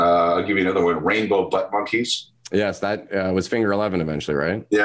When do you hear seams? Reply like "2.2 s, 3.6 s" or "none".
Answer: none